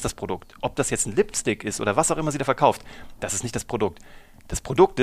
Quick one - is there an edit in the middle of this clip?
no; 0 cuts

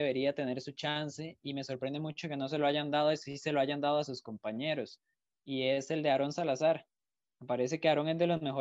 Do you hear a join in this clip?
no; 0 cuts

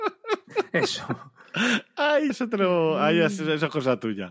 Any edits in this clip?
yes; 1 cut; at 2.3 s

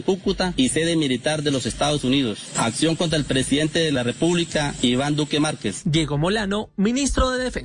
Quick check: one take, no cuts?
yes; 0 cuts

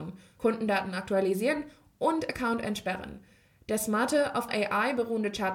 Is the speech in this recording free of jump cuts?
no; 1 cut; at 4.5 s

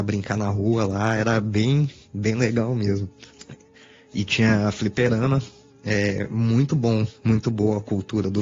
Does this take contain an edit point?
no; 0 cuts

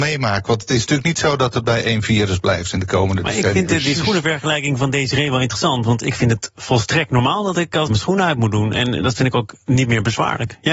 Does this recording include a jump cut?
yes; 1 cut; at 7.9 s

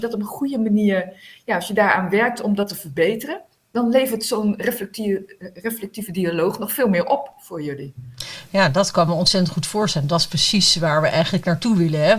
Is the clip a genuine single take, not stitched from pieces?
yes; 0 cuts

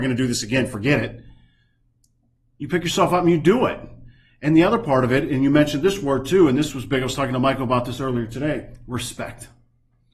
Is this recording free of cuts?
yes; 0 cuts

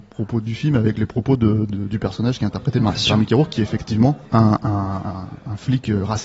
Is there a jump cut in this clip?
yes; 1 cut; at 4.3 s

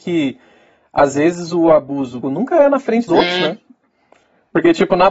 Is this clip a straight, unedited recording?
no; 2 cuts; at 2.2 s, 3.1 s

